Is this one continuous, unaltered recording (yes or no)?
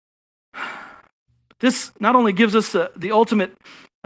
yes